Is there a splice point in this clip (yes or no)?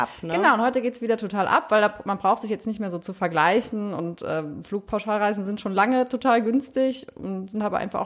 no